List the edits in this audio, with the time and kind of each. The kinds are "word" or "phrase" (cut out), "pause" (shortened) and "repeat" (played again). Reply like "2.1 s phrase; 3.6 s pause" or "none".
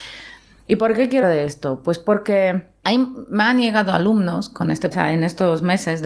1.2 s word; 2.8 s word; 4.9 s phrase